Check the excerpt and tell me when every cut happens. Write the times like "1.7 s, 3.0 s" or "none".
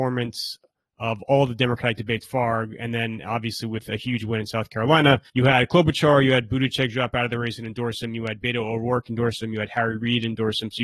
2.2 s, 5.3 s